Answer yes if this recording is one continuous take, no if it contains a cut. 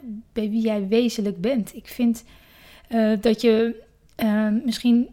yes